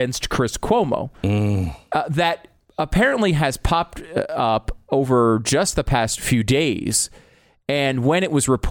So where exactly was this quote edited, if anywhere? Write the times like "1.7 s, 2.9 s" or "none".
none